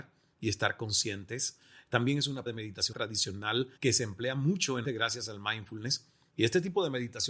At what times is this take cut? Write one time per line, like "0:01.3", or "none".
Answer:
0:02.5
0:02.9
0:03.8
0:04.8